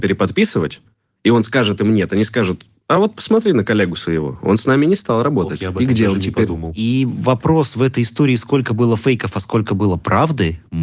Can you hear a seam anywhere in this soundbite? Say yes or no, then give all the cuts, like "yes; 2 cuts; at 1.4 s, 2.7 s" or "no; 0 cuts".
no; 0 cuts